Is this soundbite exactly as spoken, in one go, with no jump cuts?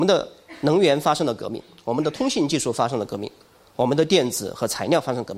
yes; 0 cuts

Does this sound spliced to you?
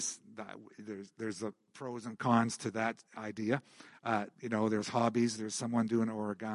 yes; 2 cuts; at 3.1 s, 4.3 s

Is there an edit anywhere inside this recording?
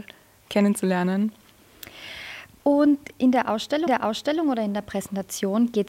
yes; 1 cut; at 3.9 s

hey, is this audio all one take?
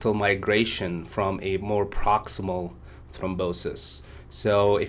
yes; 0 cuts

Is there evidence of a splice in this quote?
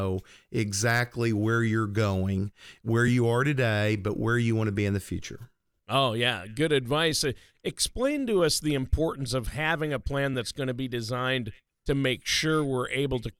no; 0 cuts

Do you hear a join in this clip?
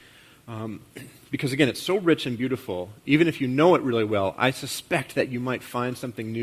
no; 0 cuts

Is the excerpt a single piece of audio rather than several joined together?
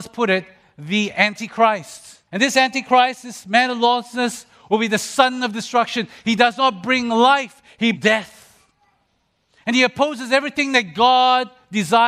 no; 2 cuts; at 2.3 s, 7.9 s

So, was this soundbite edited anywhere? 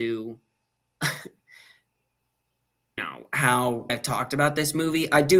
yes; 2 cuts; at 3.0 s, 3.9 s

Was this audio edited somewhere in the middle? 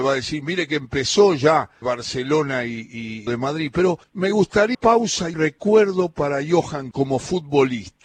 yes; 6 cuts; at 1.8 s, 3.3 s, 4.0 s, 4.7 s, 5.3 s, 6.9 s

